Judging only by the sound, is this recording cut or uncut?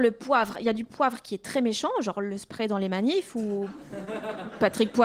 uncut